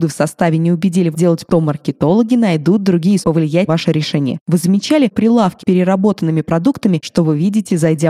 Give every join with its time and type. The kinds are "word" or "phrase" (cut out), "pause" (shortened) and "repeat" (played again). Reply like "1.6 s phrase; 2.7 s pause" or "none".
1.1 s word; 1.5 s word; 3.2 s word; 3.7 s word; 5.1 s word; 5.6 s word; 7.0 s word